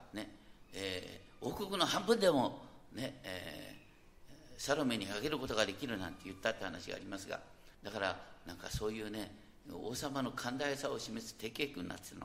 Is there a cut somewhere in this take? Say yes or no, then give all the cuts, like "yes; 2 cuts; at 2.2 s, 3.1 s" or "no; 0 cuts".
yes; 1 cut; at 7.7 s